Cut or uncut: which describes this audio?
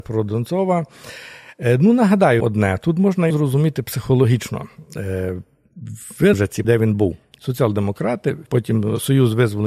cut